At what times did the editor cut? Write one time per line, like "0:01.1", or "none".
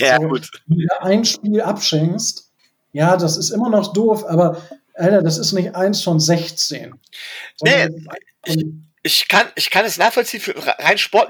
none

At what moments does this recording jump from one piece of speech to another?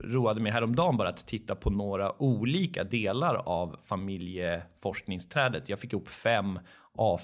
none

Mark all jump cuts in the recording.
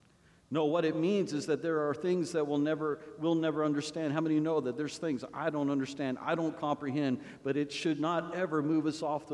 none

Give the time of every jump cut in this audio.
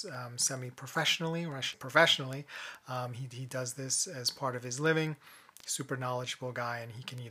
0:01.7

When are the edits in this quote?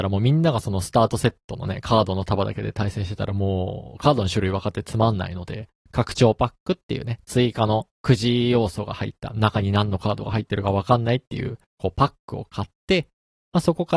0:11.7

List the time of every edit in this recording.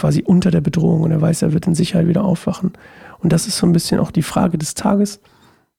none

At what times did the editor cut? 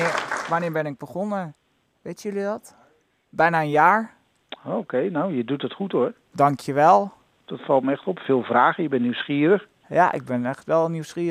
none

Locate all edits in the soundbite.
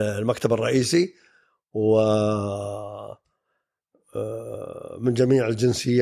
none

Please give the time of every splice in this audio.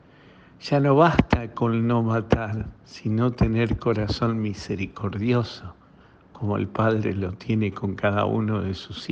none

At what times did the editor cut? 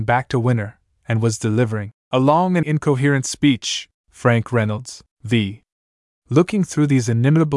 0:02.0
0:02.6
0:03.9
0:05.1

